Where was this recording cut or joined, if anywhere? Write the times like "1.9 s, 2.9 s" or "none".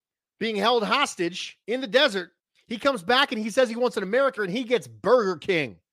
1.6 s, 2.4 s, 4.4 s